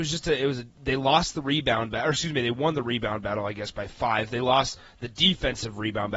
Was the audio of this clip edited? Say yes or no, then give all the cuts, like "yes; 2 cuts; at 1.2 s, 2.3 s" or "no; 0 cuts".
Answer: no; 0 cuts